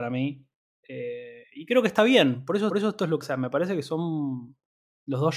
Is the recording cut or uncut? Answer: cut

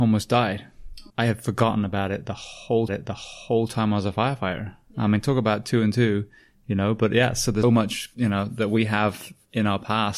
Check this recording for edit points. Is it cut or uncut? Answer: cut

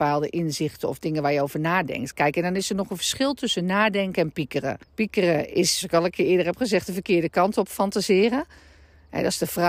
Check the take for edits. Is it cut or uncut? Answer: cut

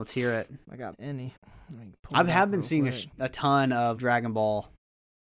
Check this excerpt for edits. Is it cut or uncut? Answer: cut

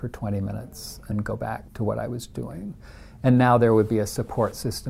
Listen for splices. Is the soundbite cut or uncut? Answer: cut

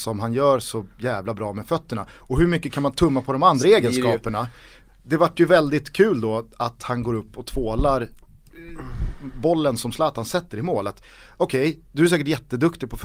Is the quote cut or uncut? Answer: uncut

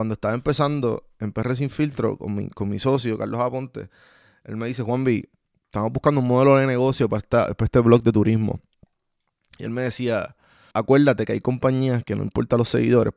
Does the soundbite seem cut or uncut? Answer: cut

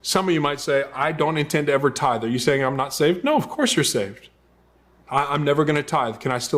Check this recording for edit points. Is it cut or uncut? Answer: uncut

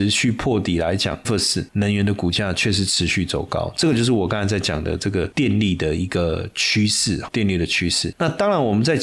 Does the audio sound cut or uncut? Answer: cut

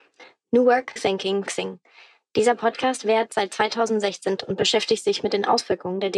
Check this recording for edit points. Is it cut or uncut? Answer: cut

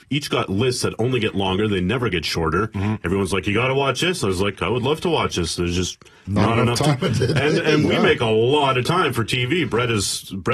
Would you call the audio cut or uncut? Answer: uncut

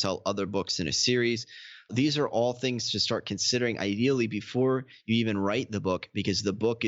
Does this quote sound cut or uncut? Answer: uncut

